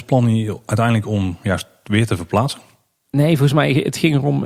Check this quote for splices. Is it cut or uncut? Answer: uncut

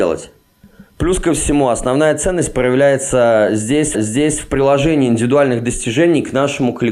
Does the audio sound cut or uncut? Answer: cut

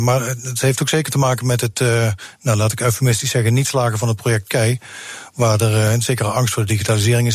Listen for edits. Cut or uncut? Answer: uncut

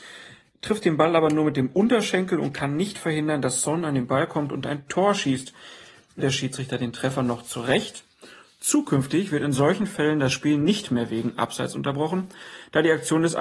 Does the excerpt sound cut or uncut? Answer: cut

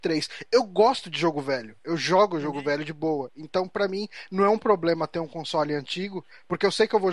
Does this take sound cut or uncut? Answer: uncut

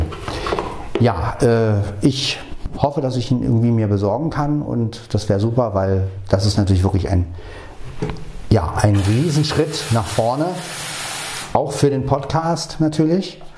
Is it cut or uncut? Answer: uncut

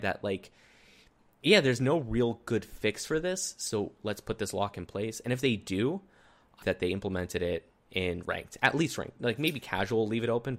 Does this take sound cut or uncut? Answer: cut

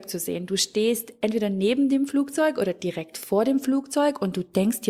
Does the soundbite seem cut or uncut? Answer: uncut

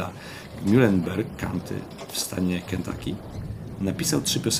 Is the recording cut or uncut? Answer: uncut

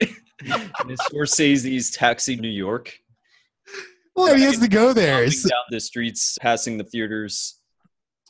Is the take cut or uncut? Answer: cut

